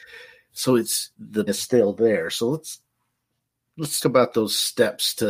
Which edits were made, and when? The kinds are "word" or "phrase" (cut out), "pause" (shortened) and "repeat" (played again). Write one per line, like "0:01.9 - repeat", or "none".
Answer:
0:01.1 - word
0:01.5 - word
0:04.0 - word